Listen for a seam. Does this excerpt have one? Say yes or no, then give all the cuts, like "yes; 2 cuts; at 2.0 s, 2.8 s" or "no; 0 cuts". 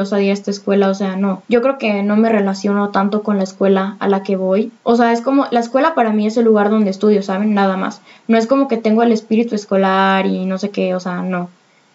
yes; 2 cuts; at 1.4 s, 4.8 s